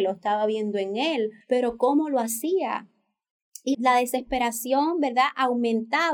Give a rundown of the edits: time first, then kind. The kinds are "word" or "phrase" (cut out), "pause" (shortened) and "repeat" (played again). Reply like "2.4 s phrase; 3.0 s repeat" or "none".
1.4 s pause; 3.7 s word

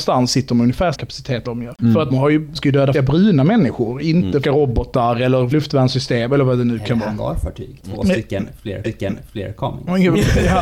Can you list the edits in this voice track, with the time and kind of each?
0.9 s word; 1.5 s word; 2.1 s word; 2.6 s word; 2.9 s word; 4.4 s phrase; 5.5 s word; 7.8 s pause; 8.8 s repeat

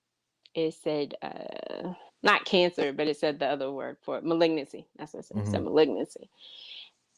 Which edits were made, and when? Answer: 2.1 s pause

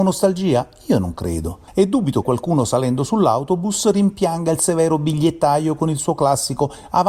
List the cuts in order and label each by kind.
1.7 s pause; 2.2 s word

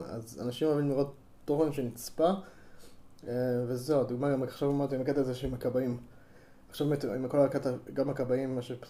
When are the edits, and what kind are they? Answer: none

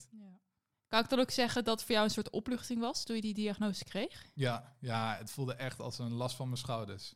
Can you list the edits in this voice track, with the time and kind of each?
none

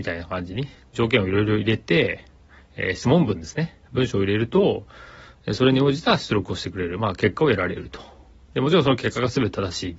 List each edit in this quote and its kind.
none

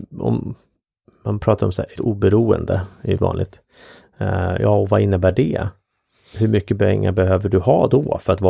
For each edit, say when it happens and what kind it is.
2.0 s word; 3.2 s word

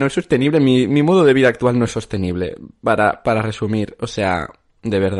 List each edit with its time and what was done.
none

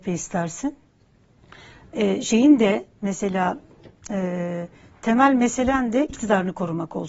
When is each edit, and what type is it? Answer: 6.1 s word

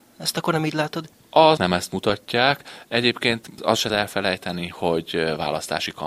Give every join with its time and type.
1.6 s word; 3.6 s word; 3.9 s word

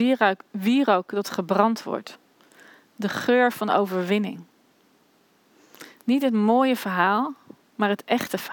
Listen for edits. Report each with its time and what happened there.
none

